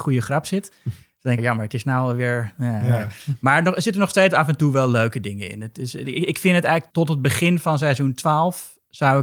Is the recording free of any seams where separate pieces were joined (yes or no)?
no